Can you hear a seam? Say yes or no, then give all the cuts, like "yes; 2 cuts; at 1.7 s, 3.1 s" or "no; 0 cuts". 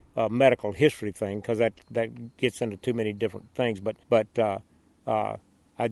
yes; 1 cut; at 4.0 s